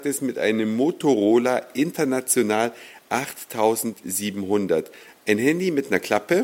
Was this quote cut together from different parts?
no; 0 cuts

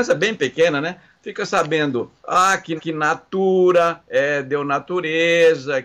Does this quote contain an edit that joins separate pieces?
yes; 2 cuts; at 2.2 s, 2.8 s

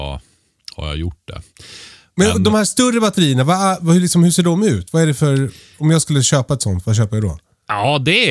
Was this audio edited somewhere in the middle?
no; 0 cuts

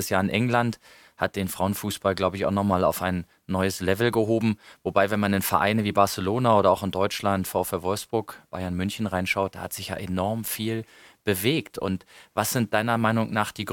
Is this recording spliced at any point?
no; 0 cuts

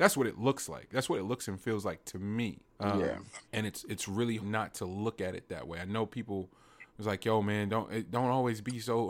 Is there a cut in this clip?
yes; 4 cuts; at 2.7 s, 3.4 s, 4.4 s, 6.9 s

